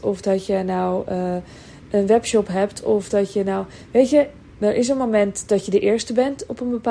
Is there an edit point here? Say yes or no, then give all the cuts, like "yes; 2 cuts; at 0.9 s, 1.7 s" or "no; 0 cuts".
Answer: yes; 1 cut; at 4.5 s